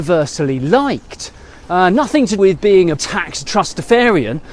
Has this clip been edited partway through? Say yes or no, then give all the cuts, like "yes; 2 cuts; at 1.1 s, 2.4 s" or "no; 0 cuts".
yes; 3 cuts; at 2.4 s, 3.0 s, 3.5 s